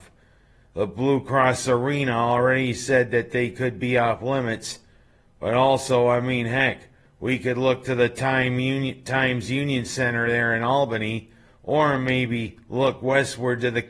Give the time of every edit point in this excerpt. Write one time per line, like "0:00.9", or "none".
none